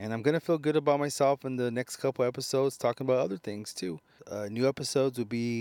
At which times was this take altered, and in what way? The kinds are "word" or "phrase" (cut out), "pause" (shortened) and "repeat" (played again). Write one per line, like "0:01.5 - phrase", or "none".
none